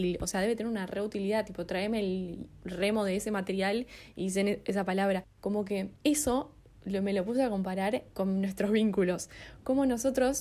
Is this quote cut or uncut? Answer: cut